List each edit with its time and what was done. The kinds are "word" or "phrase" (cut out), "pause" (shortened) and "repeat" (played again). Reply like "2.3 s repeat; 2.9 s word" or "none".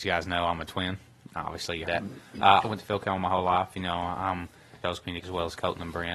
1.8 s word; 2.6 s word; 4.8 s phrase; 5.2 s word